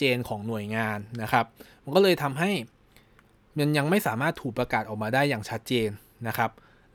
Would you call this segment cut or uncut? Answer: uncut